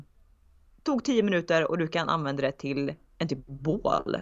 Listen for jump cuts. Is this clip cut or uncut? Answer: uncut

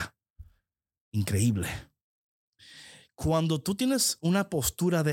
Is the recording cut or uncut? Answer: uncut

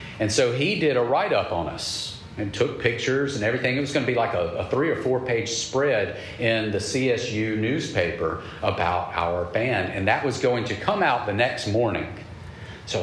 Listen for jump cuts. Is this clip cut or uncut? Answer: uncut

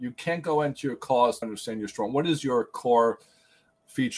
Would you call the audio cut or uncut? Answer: cut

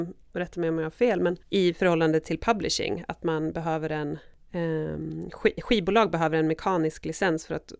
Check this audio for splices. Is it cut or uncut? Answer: cut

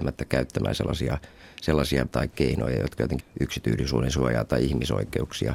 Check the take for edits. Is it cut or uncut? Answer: cut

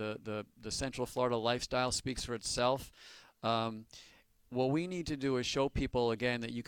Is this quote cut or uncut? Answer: uncut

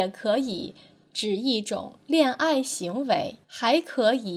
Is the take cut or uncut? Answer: cut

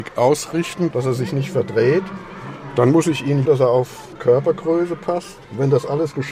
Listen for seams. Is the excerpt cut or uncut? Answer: cut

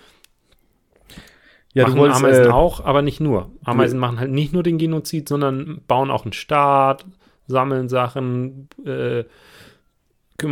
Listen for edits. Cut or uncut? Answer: uncut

